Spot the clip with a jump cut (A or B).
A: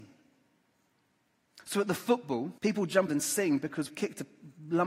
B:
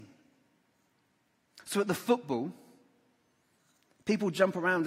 A